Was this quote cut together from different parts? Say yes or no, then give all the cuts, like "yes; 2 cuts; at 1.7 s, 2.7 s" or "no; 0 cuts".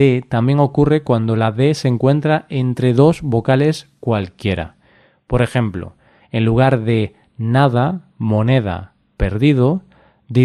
no; 0 cuts